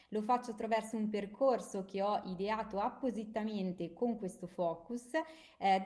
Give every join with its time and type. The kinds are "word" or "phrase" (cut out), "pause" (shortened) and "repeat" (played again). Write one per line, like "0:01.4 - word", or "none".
none